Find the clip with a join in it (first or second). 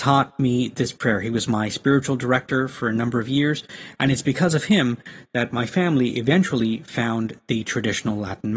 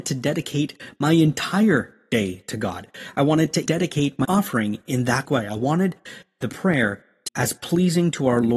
second